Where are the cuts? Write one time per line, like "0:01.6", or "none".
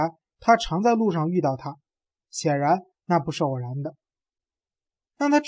none